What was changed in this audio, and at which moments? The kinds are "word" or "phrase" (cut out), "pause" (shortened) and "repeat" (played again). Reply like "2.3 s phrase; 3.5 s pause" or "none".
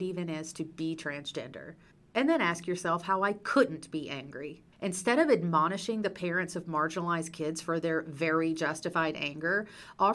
1.9 s pause; 4.7 s pause